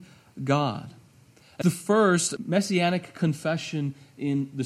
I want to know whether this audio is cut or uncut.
cut